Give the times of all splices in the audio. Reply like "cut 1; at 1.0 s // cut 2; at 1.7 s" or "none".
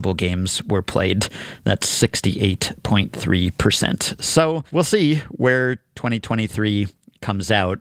cut 1; at 4.7 s